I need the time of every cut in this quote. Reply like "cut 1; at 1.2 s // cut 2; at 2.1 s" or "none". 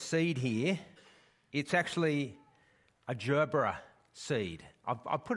none